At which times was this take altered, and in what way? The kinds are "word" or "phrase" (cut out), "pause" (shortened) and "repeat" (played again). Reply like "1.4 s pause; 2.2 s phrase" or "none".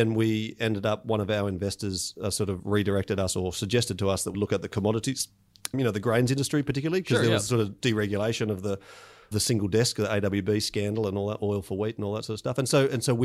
4.3 s word; 5.7 s word; 9.3 s word